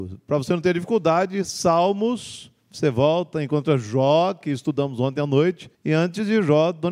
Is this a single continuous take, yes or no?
no